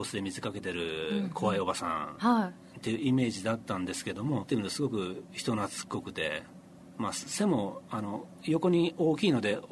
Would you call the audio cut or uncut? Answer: cut